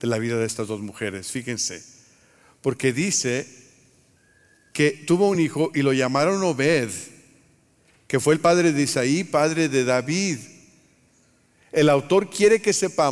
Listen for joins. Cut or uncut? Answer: uncut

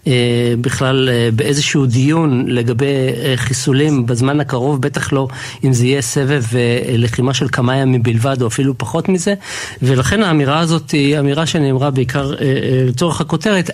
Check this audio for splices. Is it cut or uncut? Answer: uncut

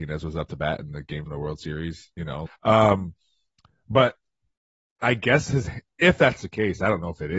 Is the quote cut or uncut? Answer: cut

